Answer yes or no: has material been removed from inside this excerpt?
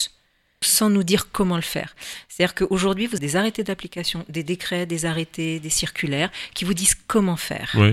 yes